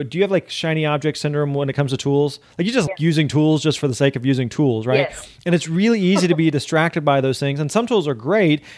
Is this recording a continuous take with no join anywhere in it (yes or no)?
no